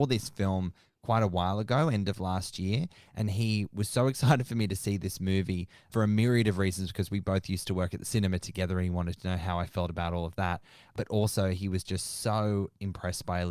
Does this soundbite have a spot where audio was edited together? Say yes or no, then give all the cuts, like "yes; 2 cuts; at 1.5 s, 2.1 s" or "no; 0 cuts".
no; 0 cuts